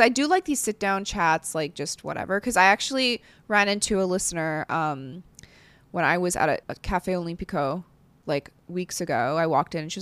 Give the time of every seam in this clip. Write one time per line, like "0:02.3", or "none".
0:06.6